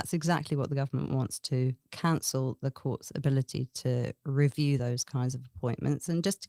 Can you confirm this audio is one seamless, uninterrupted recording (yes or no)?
yes